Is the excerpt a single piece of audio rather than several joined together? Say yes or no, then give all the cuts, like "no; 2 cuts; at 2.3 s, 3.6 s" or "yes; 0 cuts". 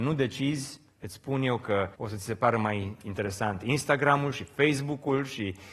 no; 1 cut; at 1.9 s